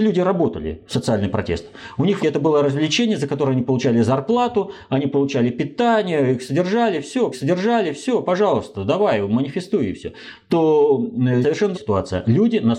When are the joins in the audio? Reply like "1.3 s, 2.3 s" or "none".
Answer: 2.2 s, 7.3 s, 11.4 s, 11.7 s

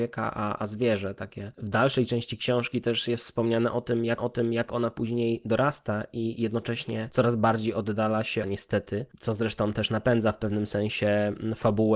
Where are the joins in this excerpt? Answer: 4.2 s, 8.4 s

